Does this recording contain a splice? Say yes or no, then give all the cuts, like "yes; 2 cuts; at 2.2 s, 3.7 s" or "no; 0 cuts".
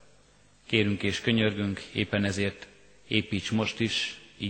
no; 0 cuts